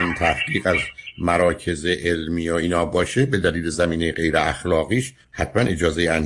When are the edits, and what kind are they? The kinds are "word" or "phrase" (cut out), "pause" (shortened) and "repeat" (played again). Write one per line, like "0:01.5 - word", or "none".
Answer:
0:05.2 - pause